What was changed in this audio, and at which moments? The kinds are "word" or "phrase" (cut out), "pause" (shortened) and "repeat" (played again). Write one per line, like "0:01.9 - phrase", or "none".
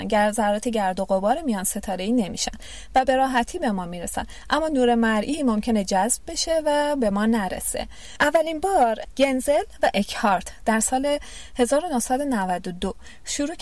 none